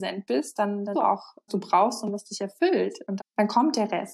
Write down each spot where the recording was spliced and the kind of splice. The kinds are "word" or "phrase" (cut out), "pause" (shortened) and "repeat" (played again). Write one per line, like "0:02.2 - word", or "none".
0:00.9 - word
0:01.5 - word
0:03.2 - word